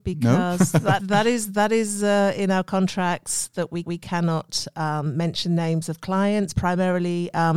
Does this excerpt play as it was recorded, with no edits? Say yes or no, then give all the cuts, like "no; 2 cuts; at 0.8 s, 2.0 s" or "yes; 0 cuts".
no; 3 cuts; at 1.0 s, 3.8 s, 6.5 s